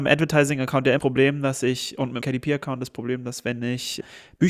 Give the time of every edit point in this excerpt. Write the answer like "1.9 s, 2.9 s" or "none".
1.0 s, 2.2 s